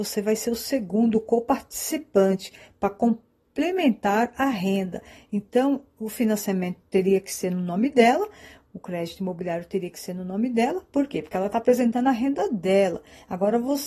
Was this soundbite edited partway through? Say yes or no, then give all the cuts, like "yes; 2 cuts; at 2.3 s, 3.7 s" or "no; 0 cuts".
no; 0 cuts